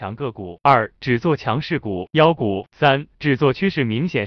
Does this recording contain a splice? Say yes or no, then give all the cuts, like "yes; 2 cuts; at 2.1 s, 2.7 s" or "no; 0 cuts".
yes; 1 cut; at 3.1 s